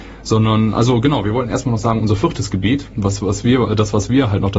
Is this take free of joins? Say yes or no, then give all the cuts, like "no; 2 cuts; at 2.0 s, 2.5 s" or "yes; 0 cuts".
yes; 0 cuts